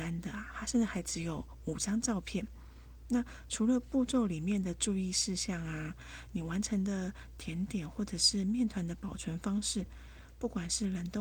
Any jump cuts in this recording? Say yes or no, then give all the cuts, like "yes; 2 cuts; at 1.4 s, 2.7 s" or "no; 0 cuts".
no; 0 cuts